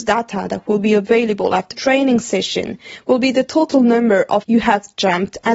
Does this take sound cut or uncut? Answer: cut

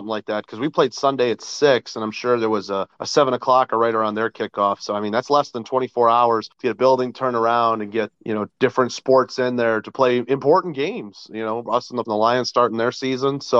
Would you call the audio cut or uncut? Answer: cut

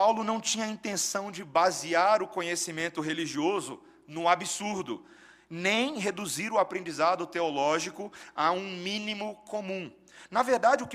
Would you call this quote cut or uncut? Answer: uncut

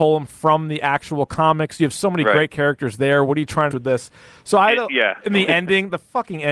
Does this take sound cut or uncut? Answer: cut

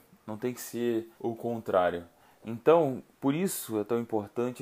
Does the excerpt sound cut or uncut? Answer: cut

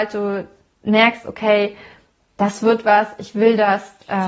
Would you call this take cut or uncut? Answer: uncut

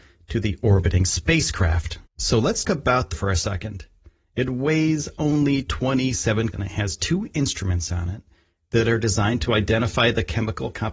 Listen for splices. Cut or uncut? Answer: cut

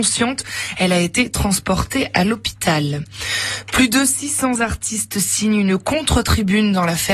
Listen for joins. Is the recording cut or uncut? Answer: uncut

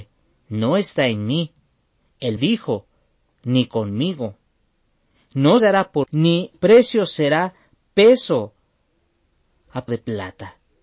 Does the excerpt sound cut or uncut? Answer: cut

